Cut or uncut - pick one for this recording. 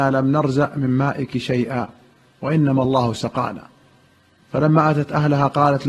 uncut